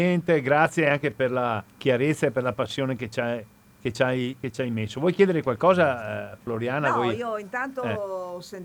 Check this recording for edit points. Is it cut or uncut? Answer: cut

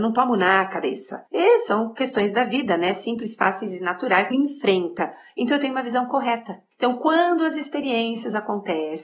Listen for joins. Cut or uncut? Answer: cut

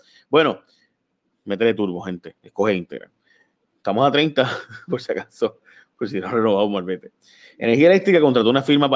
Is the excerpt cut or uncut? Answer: uncut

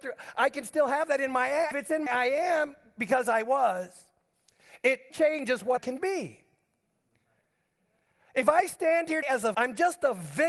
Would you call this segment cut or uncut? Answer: cut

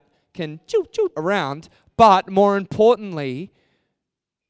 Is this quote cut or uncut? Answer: cut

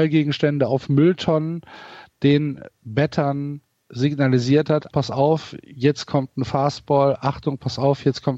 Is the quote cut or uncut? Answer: cut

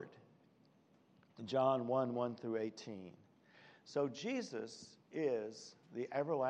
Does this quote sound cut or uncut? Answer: uncut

